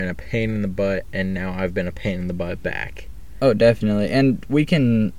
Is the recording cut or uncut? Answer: uncut